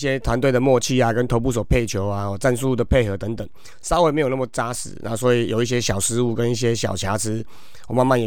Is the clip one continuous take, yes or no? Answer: yes